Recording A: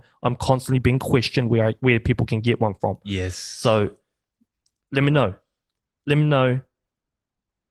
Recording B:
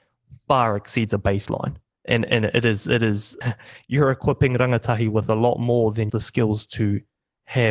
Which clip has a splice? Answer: B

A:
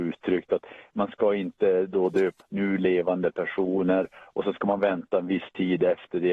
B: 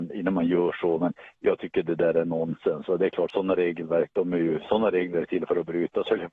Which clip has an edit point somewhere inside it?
A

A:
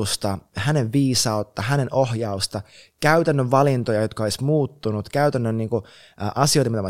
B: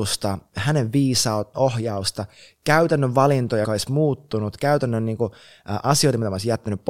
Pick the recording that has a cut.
B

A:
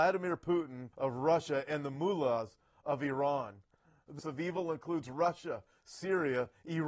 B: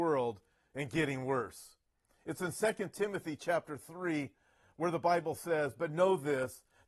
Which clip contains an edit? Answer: A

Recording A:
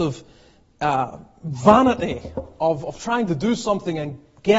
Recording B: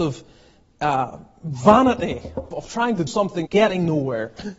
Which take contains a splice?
B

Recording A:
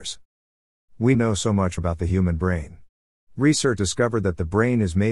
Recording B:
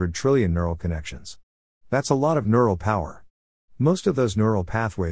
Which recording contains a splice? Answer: A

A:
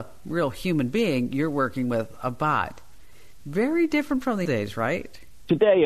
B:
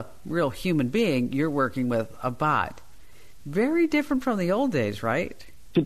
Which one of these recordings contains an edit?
A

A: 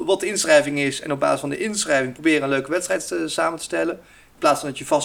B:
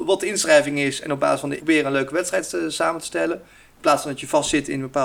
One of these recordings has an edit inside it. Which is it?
B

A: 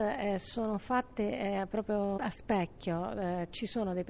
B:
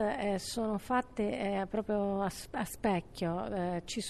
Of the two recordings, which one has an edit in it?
A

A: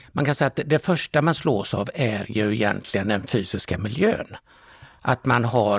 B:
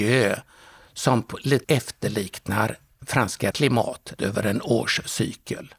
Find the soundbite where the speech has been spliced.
B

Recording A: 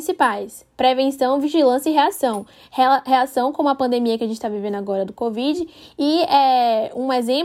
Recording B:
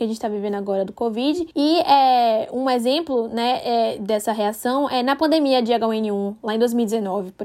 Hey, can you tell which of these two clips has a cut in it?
B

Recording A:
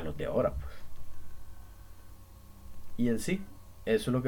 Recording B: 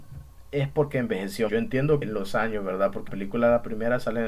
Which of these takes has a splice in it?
B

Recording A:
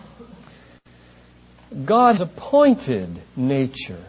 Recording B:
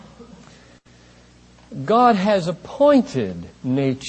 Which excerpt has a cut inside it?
A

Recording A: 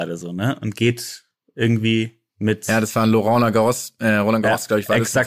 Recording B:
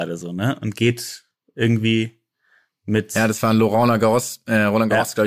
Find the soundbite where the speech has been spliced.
A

